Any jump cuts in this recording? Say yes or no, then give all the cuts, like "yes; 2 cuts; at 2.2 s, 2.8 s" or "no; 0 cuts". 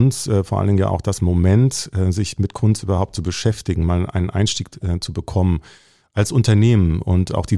no; 0 cuts